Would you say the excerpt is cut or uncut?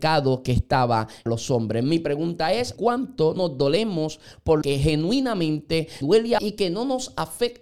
cut